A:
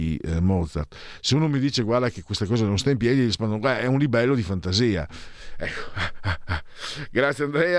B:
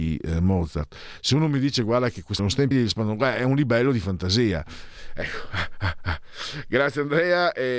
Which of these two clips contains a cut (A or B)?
B